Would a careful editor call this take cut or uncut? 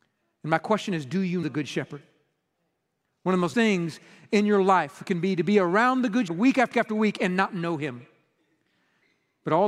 cut